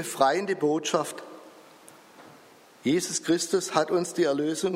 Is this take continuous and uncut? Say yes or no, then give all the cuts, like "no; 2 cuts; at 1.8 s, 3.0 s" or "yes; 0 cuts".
yes; 0 cuts